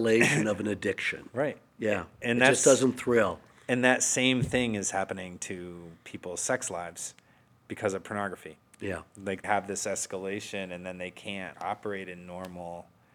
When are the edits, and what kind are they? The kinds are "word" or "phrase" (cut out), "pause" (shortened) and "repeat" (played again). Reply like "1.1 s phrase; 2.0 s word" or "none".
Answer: 9.4 s word; 11.5 s word